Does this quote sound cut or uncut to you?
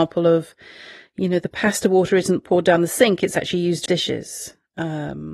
cut